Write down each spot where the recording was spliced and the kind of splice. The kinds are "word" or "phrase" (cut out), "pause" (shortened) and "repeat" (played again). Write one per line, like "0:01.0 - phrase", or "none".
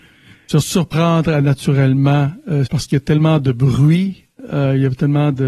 0:02.7 - word